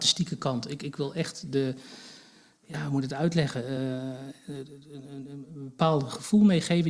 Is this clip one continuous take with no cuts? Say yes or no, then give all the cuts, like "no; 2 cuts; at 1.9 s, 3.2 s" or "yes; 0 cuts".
yes; 0 cuts